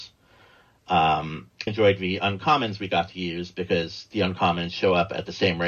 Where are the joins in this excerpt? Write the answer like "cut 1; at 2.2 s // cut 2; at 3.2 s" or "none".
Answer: cut 1; at 1.7 s